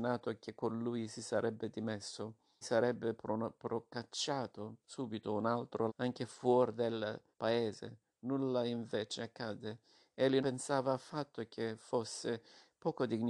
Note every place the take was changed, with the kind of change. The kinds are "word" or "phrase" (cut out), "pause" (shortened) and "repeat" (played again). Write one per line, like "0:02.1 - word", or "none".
0:02.6 - word
0:05.9 - word
0:07.3 - pause
0:10.4 - word